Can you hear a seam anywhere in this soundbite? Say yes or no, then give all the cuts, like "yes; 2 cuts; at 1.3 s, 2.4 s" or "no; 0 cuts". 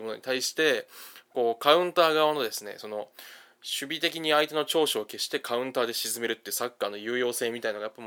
no; 0 cuts